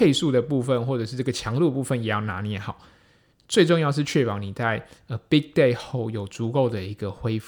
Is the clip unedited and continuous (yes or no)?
yes